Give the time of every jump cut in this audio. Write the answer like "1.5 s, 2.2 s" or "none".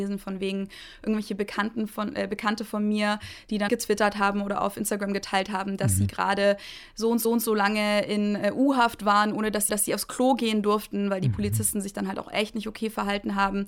3.7 s, 7.2 s, 9.7 s

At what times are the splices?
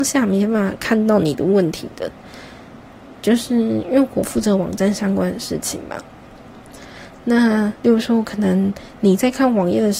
7.8 s

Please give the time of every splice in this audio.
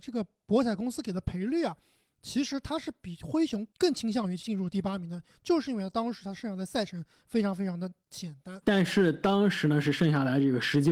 8.6 s

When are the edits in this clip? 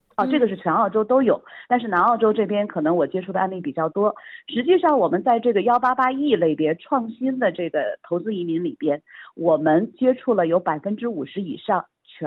none

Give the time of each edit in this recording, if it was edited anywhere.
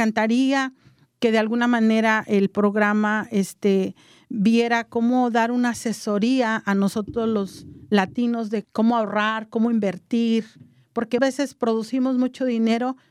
8.6 s, 11.2 s

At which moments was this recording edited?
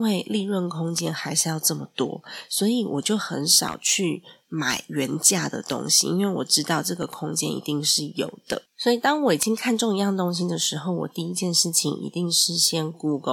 8.7 s

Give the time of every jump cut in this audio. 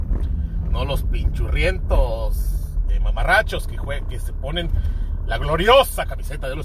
none

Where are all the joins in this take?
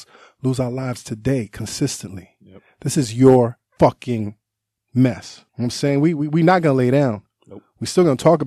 3.7 s, 5.5 s

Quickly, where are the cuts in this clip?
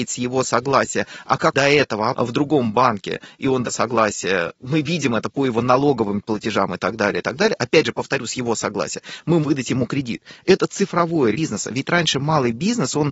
1.5 s, 2.1 s, 3.6 s, 4.6 s, 9.4 s, 11.3 s

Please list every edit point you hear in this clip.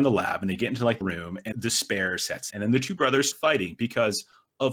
1.0 s, 1.5 s, 2.5 s, 3.3 s

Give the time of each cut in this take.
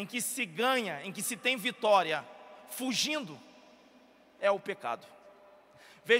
none

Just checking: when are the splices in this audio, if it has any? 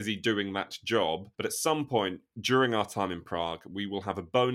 1.3 s

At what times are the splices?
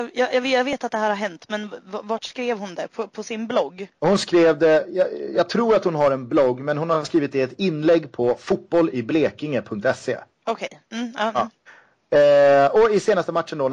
4.0 s, 10.3 s, 11.7 s

